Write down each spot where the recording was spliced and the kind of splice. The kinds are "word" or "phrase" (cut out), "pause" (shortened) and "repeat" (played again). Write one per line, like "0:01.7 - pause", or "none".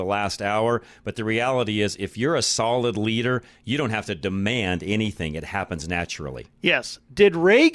none